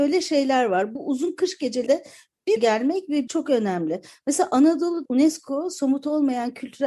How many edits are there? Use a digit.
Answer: 5